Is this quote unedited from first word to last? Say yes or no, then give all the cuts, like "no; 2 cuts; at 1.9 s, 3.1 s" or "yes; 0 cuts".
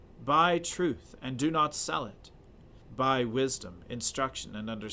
no; 1 cut; at 2.8 s